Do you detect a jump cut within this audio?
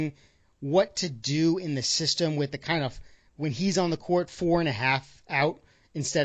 no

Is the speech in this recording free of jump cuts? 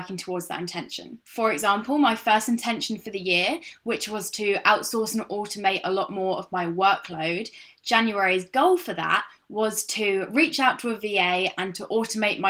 yes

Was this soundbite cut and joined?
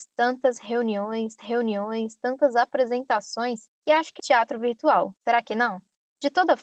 yes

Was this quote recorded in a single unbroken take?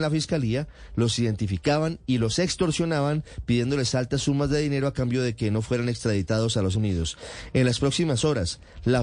no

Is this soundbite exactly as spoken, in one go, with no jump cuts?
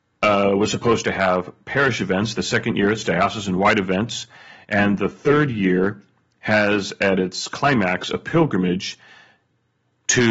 yes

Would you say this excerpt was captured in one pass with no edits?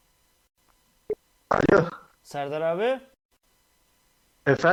no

